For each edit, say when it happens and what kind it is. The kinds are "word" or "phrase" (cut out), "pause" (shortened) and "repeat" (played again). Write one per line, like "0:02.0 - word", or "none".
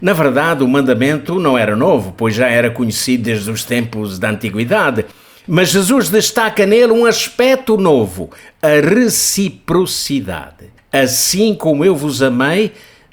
none